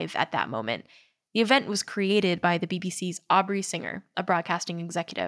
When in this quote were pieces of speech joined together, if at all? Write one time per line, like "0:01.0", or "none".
none